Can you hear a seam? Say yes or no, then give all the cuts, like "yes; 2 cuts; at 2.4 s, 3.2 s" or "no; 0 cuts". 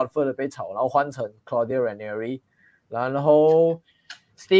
no; 0 cuts